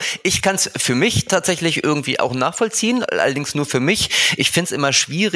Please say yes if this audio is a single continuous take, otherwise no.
yes